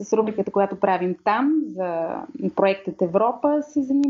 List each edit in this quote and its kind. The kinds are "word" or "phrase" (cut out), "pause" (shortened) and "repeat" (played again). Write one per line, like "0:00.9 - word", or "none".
none